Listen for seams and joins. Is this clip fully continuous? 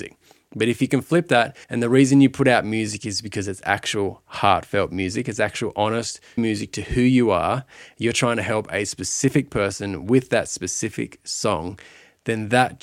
no; 2 cuts; at 1.6 s, 6.4 s

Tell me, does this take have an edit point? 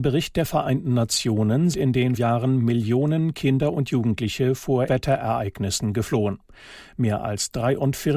yes; 3 cuts; at 1.7 s, 2.2 s, 4.9 s

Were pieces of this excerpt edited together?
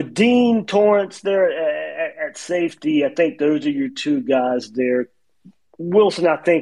no; 0 cuts

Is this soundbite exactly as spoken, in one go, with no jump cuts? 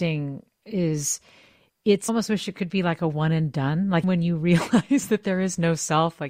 no; 2 cuts; at 2.1 s, 4.0 s

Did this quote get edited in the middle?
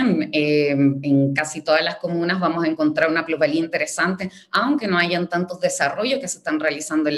no; 0 cuts

